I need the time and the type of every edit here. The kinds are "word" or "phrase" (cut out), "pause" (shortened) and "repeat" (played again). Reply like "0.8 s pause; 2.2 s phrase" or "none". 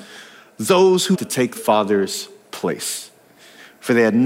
1.1 s phrase; 1.6 s word

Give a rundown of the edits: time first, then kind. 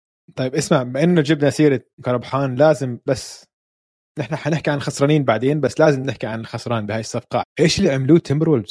2.0 s word; 7.4 s word

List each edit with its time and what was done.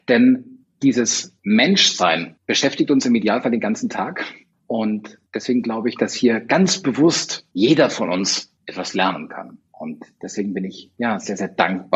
none

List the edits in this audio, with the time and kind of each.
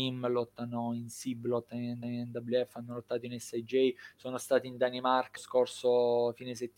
2.0 s repeat; 5.4 s word

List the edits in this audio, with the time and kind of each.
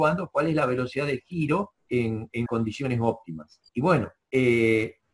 1.8 s pause; 2.5 s word; 3.7 s pause; 4.2 s pause

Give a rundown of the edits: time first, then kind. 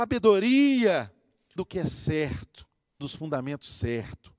1.6 s word; 3.0 s word

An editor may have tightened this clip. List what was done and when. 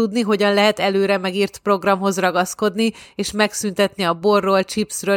none

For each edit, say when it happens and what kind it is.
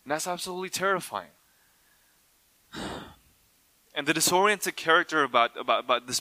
1.4 s pause

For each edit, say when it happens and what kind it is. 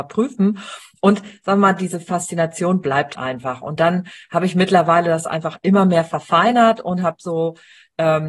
3.2 s word

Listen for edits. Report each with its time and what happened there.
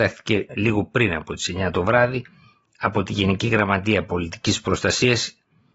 none

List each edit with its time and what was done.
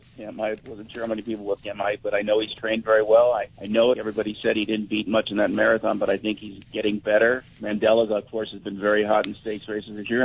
1.6 s word; 3.5 s pause; 3.9 s word; 7.5 s pause

